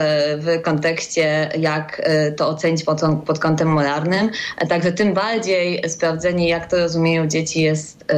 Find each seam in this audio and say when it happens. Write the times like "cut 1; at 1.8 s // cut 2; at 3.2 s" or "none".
none